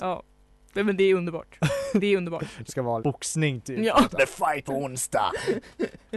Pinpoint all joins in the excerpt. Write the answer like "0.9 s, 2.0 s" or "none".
2.7 s, 3.0 s, 4.2 s, 4.7 s